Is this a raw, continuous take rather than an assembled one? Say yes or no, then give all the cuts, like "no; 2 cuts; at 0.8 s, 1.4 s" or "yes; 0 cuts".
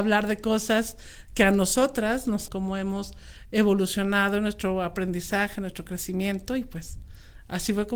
no; 1 cut; at 2.5 s